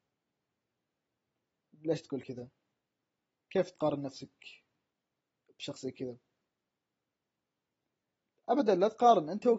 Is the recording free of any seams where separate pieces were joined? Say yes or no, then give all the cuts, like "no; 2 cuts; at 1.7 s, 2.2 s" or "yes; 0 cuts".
yes; 0 cuts